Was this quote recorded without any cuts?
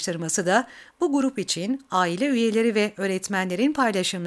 yes; 0 cuts

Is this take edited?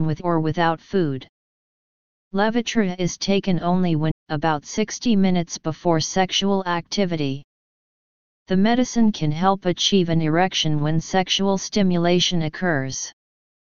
yes; 1 cut; at 4.1 s

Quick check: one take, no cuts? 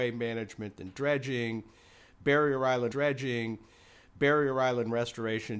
no; 1 cut; at 2.9 s

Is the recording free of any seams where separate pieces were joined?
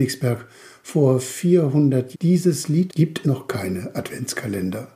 no; 3 cuts; at 2.1 s, 2.9 s, 3.2 s

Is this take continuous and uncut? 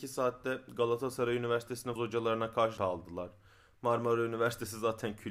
no; 2 cuts; at 2.0 s, 2.8 s

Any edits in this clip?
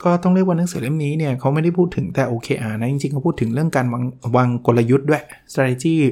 no; 0 cuts

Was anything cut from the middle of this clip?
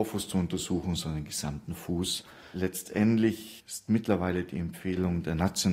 no; 0 cuts

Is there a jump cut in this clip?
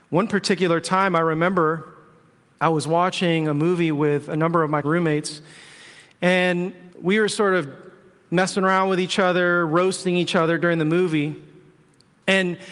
yes; 2 cuts; at 4.8 s, 6.9 s

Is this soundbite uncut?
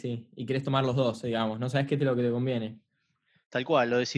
yes; 0 cuts

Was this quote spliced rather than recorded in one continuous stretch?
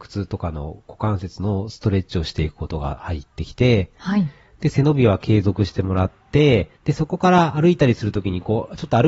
yes; 1 cut; at 6.8 s

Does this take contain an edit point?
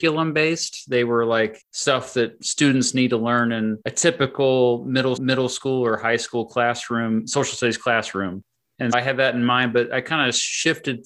yes; 4 cuts; at 1.6 s, 3.8 s, 5.2 s, 8.9 s

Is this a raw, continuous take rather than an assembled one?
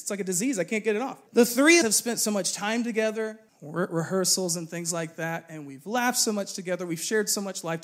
no; 3 cuts; at 1.3 s, 1.8 s, 3.5 s

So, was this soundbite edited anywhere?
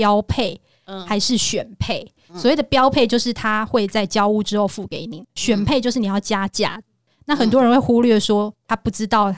no; 0 cuts

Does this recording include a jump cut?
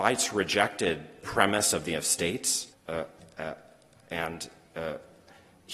yes; 3 cuts; at 1.2 s, 1.9 s, 2.7 s

